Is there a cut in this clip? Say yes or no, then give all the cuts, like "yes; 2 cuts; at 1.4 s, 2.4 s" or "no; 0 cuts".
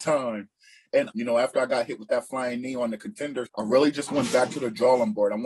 yes; 2 cuts; at 1.1 s, 3.5 s